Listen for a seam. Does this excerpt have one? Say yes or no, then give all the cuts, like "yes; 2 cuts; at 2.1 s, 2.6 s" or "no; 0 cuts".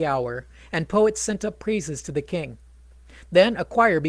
no; 0 cuts